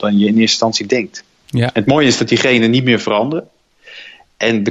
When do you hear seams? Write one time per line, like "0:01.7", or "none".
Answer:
none